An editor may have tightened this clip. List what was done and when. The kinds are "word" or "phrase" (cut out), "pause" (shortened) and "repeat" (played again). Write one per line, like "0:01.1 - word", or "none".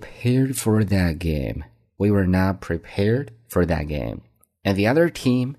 none